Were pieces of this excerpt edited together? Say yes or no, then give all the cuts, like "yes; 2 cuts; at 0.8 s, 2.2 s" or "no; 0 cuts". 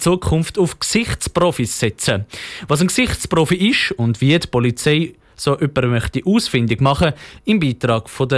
no; 0 cuts